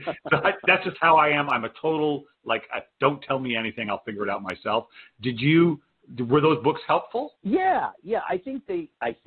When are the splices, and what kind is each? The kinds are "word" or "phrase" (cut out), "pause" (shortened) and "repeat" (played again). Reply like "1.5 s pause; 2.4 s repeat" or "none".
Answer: 7.4 s pause